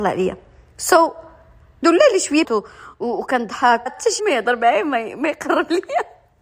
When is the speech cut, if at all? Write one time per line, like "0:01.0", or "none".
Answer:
0:01.8
0:02.4
0:03.9
0:04.2